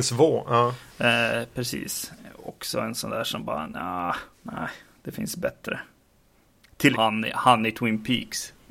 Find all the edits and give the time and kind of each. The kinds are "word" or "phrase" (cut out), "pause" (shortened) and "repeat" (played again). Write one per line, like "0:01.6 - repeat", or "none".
0:04.3 - pause
0:06.9 - word